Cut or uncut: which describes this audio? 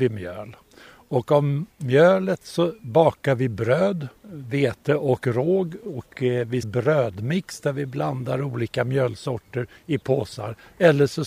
cut